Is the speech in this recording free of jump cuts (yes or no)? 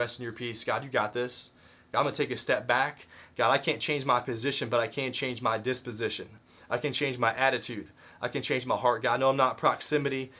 yes